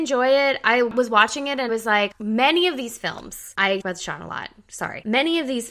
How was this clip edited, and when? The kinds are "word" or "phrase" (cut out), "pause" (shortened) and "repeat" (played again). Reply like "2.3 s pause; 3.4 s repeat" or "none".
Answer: 1.7 s word; 3.8 s word